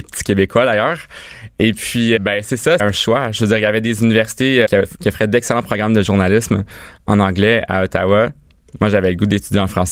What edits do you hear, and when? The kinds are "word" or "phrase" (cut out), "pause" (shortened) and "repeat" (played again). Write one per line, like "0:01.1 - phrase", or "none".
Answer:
0:02.2 - word
0:02.8 - word
0:04.7 - word

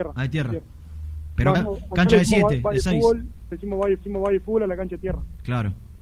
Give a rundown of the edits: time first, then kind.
0:01.5 - word
0:03.5 - word
0:04.0 - repeat

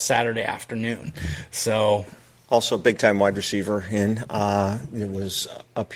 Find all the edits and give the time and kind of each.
none

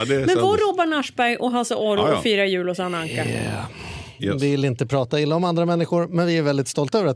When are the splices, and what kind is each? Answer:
none

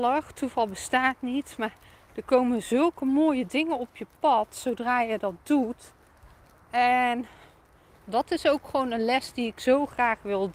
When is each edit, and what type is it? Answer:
none

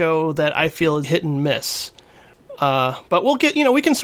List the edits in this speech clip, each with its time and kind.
0:01.0 - word

